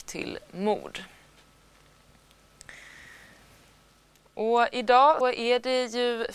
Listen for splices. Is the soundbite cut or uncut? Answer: cut